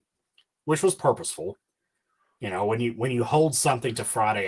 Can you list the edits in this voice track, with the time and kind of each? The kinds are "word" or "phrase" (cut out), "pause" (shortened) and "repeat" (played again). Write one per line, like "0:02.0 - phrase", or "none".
none